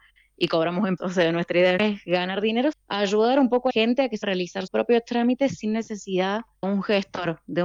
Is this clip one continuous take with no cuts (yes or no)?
no